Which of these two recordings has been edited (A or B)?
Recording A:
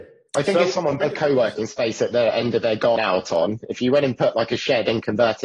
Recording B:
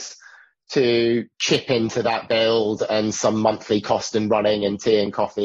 A